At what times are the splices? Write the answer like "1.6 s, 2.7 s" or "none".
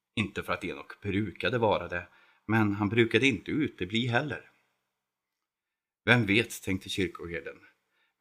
none